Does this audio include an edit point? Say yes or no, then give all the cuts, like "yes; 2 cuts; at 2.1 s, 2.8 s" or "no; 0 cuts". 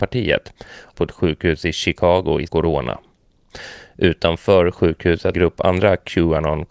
yes; 3 cuts; at 0.9 s, 2.5 s, 5.3 s